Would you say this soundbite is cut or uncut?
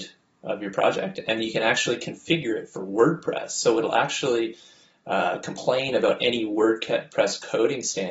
uncut